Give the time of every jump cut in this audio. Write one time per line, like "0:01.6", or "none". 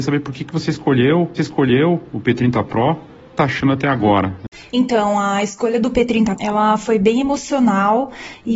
0:01.4
0:03.4
0:04.5
0:06.4